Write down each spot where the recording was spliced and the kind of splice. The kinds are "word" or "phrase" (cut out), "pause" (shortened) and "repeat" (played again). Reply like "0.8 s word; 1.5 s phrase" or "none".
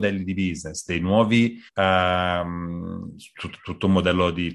1.7 s pause